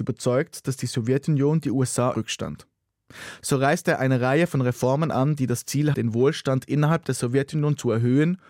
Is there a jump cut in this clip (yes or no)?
yes